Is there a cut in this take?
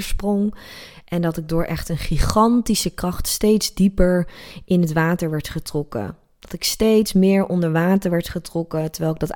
no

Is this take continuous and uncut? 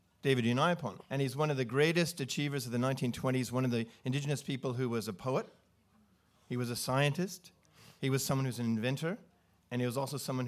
no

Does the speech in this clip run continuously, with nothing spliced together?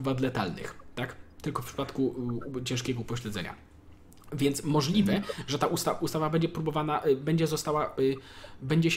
yes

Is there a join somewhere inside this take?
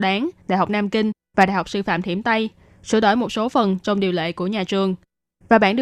no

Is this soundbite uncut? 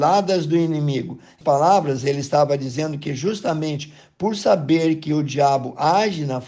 no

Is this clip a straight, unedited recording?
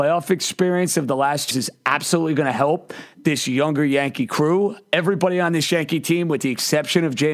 no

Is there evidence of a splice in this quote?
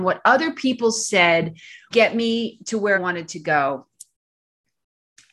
yes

